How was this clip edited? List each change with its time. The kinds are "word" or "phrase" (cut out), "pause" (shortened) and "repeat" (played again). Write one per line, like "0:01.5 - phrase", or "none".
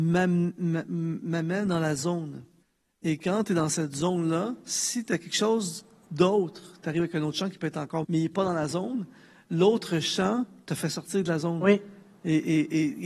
0:02.6 - pause
0:08.0 - word